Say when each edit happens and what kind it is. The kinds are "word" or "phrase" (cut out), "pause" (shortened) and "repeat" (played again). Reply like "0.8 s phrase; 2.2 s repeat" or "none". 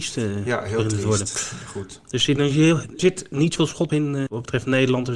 3.0 s word; 3.6 s word; 3.9 s word; 4.3 s word